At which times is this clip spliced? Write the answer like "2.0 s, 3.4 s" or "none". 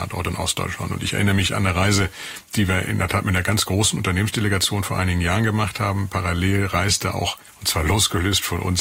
none